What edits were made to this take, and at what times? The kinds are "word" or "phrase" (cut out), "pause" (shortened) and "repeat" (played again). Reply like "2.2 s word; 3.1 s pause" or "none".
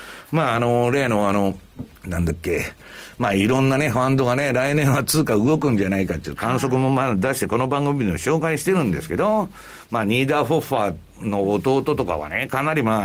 1.9 s pause